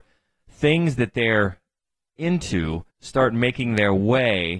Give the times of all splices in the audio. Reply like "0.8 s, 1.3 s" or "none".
2.9 s